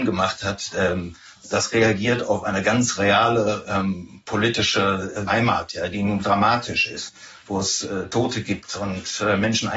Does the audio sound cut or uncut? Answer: cut